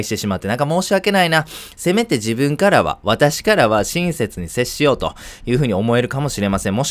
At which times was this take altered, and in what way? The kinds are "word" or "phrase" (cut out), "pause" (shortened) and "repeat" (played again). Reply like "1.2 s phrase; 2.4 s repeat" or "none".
none